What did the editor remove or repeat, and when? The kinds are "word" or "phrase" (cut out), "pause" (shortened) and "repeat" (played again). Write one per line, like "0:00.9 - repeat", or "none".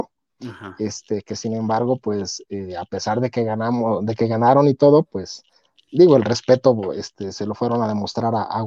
none